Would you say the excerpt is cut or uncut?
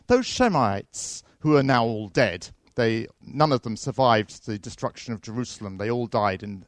uncut